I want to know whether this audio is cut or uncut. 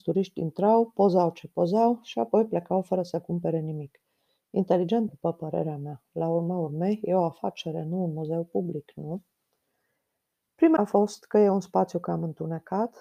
cut